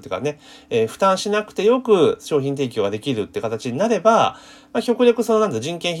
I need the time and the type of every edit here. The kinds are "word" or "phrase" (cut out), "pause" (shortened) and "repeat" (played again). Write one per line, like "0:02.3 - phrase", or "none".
none